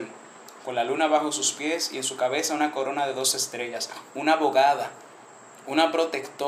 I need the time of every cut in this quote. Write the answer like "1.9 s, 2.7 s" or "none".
none